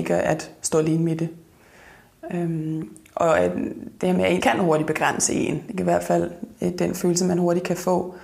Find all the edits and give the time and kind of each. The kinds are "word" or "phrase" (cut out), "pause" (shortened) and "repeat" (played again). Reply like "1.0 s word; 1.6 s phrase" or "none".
4.4 s word